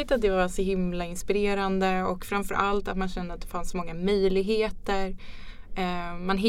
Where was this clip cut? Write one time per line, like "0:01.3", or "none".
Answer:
none